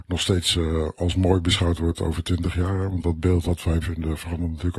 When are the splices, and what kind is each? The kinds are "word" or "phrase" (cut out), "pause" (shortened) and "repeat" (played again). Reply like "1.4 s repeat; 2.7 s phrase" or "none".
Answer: 3.4 s word; 3.8 s word

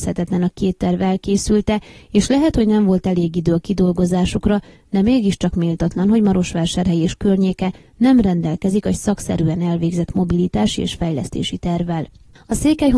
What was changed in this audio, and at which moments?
none

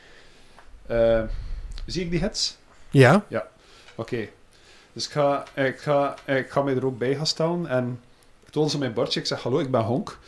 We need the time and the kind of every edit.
5.8 s repeat

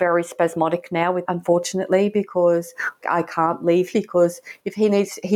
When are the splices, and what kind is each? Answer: 1.3 s word; 3.0 s word; 3.9 s word

